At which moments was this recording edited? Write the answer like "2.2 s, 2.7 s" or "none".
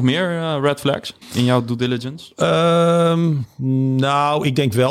1.2 s